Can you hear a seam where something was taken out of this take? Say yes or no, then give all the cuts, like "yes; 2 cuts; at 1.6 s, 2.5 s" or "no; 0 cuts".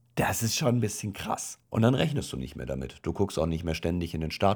yes; 1 cut; at 1.6 s